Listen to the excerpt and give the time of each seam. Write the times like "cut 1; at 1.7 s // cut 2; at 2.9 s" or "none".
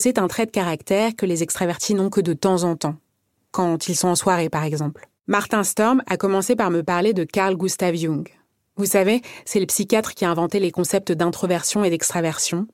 cut 1; at 5.2 s

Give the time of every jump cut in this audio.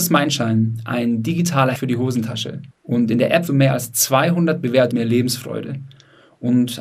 cut 1; at 1.8 s // cut 2; at 2.7 s // cut 3; at 3.5 s // cut 4; at 4.9 s

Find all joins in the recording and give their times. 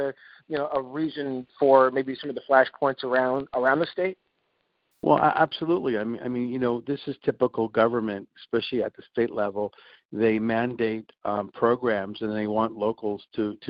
cut 1; at 8.3 s

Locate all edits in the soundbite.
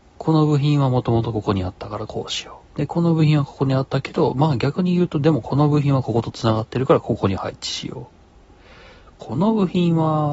cut 1; at 2.6 s

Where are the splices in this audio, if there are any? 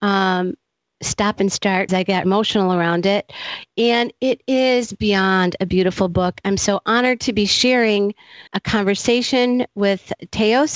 cut 1; at 1.9 s // cut 2; at 2.2 s // cut 3; at 8.5 s

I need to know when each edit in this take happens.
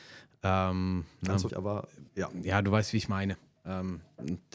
cut 1; at 1.5 s // cut 2; at 2.1 s

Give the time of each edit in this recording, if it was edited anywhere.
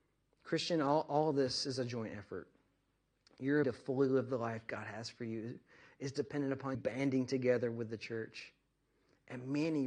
cut 1; at 3.6 s // cut 2; at 6.7 s

